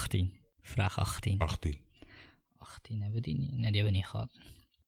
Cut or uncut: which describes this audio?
uncut